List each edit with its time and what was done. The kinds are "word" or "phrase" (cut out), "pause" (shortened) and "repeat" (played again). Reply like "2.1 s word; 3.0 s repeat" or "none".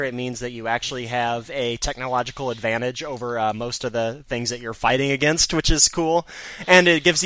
none